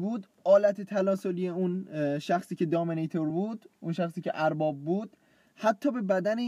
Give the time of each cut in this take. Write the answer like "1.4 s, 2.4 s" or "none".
none